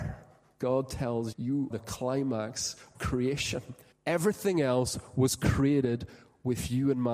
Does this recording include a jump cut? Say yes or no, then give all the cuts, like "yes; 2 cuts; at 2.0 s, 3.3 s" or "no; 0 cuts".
yes; 4 cuts; at 1.3 s, 1.7 s, 2.9 s, 3.9 s